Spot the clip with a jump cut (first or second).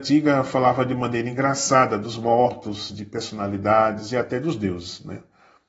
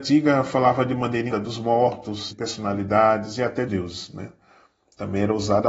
second